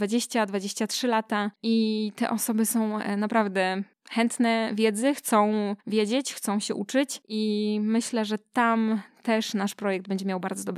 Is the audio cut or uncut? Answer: uncut